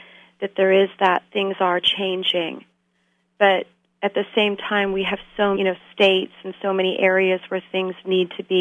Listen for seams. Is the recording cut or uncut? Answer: cut